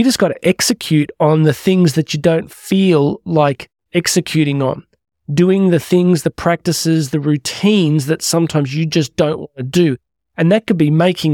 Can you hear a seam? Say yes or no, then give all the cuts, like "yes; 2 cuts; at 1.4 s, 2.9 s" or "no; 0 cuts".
no; 0 cuts